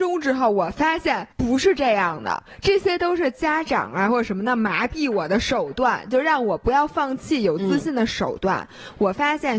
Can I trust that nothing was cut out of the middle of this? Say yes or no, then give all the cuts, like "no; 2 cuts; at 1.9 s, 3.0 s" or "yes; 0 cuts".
no; 1 cut; at 1.3 s